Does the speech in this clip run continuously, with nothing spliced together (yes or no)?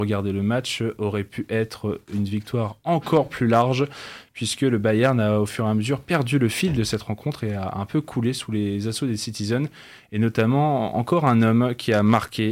yes